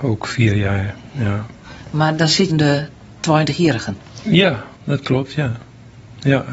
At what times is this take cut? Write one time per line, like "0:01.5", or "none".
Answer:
0:02.5
0:04.8